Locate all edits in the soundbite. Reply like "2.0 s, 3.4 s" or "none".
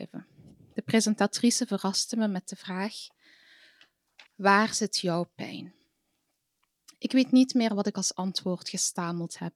4.3 s